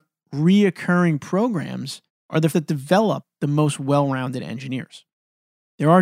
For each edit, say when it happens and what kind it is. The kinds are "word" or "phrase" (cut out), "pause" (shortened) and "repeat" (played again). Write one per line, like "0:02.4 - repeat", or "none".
0:02.5 - word